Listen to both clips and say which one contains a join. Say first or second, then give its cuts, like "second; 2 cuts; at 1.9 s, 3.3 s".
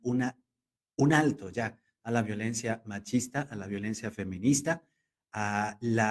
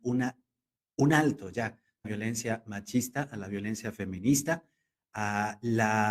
second; 1 cut; at 2.0 s